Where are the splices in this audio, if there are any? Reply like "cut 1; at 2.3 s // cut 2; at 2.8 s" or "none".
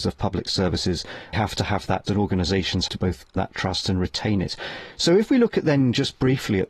cut 1; at 1.3 s // cut 2; at 2.0 s // cut 3; at 2.9 s // cut 4; at 3.4 s